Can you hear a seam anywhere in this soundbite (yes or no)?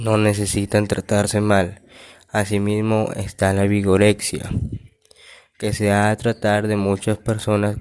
no